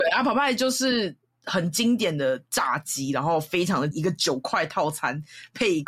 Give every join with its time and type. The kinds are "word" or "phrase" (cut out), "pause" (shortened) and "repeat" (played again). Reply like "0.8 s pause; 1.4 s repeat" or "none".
3.9 s word